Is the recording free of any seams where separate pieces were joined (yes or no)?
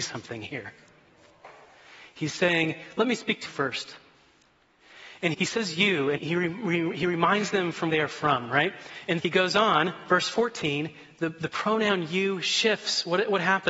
no